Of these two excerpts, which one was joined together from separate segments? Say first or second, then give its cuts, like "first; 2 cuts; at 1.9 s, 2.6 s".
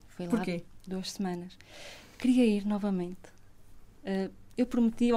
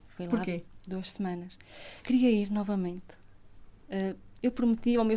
second; 1 cut; at 2.0 s